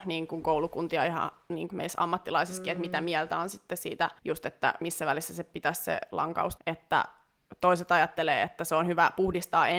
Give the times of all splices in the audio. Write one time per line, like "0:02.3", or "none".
0:01.7
0:04.2
0:06.6